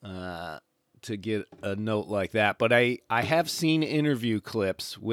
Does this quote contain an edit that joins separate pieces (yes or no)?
no